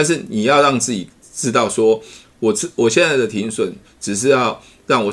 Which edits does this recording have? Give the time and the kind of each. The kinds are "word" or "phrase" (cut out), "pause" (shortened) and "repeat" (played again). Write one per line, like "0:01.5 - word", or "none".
0:01.2 - pause